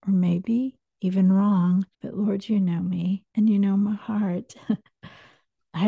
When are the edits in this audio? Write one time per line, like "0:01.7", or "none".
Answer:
0:01.9
0:03.3